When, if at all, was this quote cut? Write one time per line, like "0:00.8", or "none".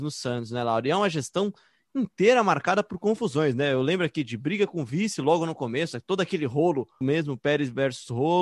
0:07.0